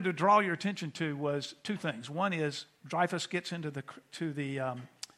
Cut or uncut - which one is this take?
uncut